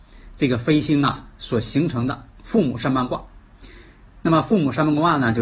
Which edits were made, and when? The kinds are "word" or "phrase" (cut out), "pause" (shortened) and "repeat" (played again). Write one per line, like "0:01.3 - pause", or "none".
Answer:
0:02.3 - pause